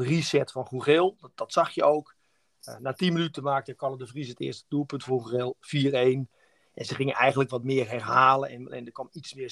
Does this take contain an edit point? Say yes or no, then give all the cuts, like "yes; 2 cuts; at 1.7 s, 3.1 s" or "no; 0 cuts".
no; 0 cuts